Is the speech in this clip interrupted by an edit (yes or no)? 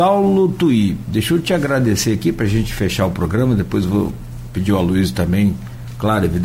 no